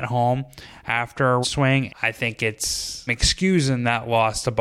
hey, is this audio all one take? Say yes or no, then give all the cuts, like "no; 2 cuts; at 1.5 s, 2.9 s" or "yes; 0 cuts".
no; 3 cuts; at 1.4 s, 1.9 s, 3.1 s